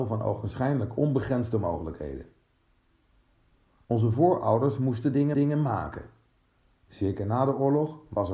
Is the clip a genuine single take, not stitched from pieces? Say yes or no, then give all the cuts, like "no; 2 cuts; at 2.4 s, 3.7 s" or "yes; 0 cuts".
no; 1 cut; at 5.3 s